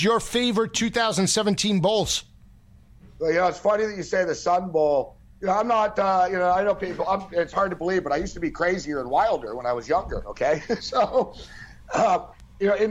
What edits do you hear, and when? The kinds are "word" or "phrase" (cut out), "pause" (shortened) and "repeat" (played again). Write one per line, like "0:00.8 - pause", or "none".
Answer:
none